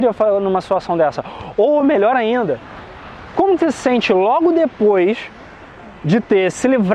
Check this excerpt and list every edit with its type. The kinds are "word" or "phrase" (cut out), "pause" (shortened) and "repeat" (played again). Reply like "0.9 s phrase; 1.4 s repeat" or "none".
none